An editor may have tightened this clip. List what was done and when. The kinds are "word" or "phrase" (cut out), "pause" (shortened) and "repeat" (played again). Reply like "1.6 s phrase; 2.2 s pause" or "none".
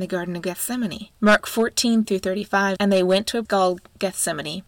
1.1 s pause; 2.0 s word; 2.8 s word; 3.4 s word

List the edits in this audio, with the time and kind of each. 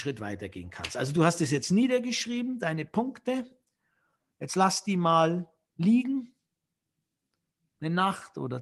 none

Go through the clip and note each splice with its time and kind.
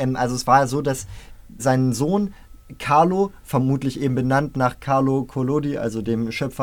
1.6 s word

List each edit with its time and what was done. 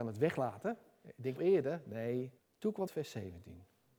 1.4 s phrase; 2.4 s pause; 2.9 s word

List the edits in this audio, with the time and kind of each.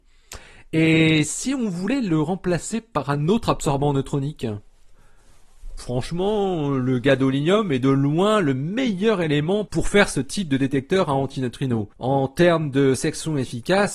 5.8 s word; 11.9 s pause

